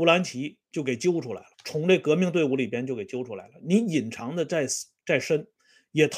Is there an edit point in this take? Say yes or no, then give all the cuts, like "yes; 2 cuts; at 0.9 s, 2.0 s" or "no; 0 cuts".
yes; 1 cut; at 1.5 s